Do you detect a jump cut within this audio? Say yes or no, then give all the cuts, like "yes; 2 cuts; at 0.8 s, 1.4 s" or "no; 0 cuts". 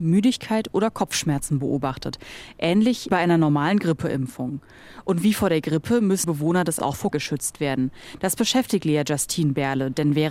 yes; 4 cuts; at 3.1 s, 6.2 s, 6.8 s, 7.1 s